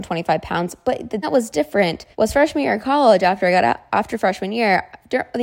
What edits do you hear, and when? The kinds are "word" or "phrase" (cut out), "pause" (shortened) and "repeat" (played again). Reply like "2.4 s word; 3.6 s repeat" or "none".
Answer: 1.2 s word; 2.1 s pause